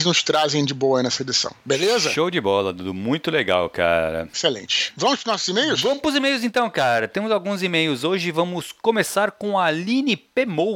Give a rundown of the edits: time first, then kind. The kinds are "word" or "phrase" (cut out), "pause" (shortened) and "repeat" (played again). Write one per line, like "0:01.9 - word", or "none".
none

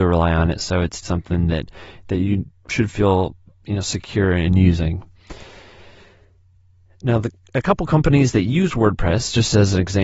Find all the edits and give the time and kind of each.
0:01.0 - word

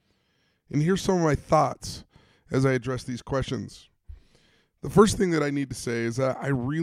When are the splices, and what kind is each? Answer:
none

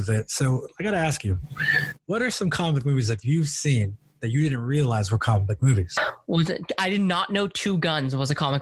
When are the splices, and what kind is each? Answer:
none

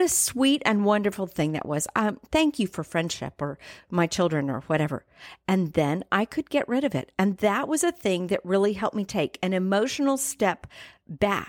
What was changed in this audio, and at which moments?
none

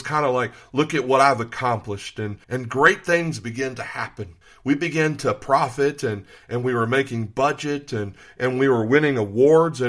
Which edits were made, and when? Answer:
0:02.4 - pause
0:04.4 - pause

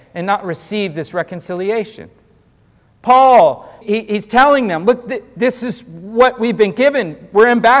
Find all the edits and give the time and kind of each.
0:03.8 - word

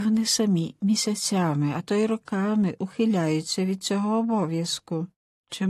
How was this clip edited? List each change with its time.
none

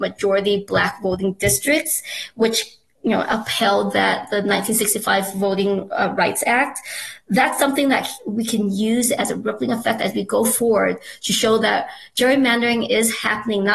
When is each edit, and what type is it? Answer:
none

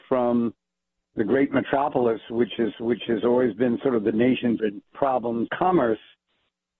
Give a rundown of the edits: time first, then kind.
0:02.7 - repeat
0:04.6 - word
0:04.9 - word
0:05.5 - phrase

